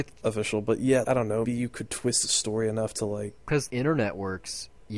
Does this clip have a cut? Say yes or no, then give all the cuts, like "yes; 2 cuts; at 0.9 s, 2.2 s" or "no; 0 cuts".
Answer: yes; 4 cuts; at 1.0 s, 1.5 s, 3.4 s, 3.7 s